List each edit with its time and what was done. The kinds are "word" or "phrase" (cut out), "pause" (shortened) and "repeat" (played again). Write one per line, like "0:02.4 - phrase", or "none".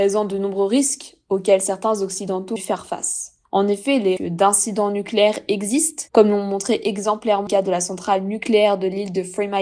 0:02.6 - phrase
0:03.4 - pause
0:04.2 - word
0:06.1 - pause
0:07.5 - word